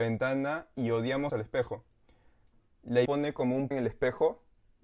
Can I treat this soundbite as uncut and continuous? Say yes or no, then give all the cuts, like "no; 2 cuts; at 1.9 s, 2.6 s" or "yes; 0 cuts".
no; 3 cuts; at 1.3 s, 3.0 s, 3.7 s